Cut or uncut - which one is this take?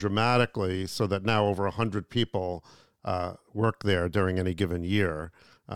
uncut